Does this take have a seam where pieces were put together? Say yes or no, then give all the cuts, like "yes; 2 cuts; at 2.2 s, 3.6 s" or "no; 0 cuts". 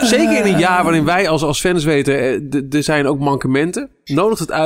no; 0 cuts